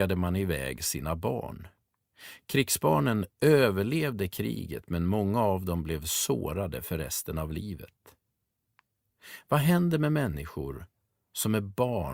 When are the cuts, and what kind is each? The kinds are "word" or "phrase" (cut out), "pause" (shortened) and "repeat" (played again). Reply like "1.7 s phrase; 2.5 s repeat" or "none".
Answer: none